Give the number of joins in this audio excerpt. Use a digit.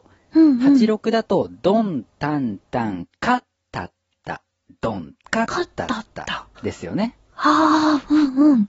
2